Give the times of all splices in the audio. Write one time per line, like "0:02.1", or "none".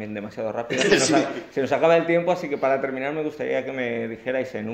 none